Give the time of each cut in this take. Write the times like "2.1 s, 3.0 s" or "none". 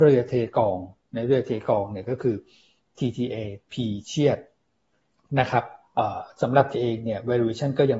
6.7 s

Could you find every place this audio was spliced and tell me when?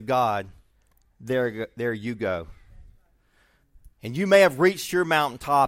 3.9 s

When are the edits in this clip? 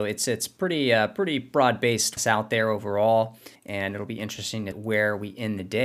2.2 s, 3.6 s, 4.7 s

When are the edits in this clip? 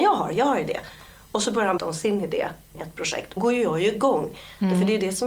1.8 s, 2.7 s, 3.4 s

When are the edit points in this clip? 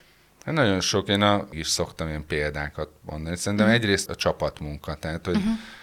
1.5 s, 4.1 s

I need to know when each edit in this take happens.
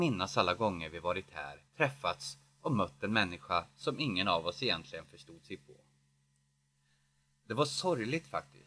1.7 s

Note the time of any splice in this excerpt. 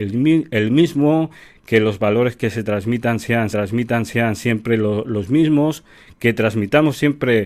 3.5 s

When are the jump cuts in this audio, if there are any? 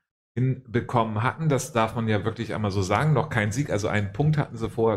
none

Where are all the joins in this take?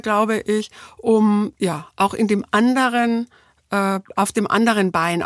none

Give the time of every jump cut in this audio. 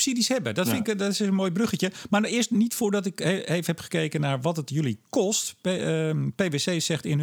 none

